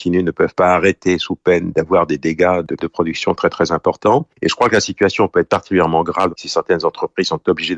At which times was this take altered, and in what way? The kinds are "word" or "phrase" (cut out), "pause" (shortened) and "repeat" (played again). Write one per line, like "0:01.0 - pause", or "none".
0:02.8 - word